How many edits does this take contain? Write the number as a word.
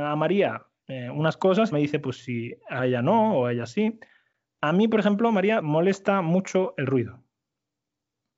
three